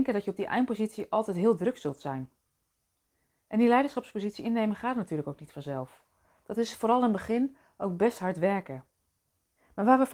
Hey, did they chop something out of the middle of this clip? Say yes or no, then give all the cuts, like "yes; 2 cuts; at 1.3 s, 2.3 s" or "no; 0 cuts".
no; 0 cuts